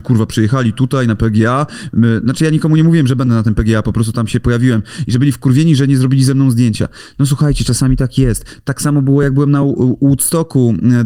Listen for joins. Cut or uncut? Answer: uncut